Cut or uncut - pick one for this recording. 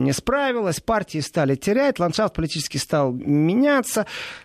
uncut